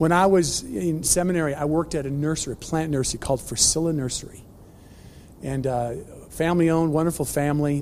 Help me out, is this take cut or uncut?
uncut